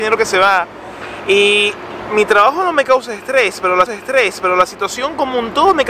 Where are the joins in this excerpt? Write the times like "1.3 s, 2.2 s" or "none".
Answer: 3.9 s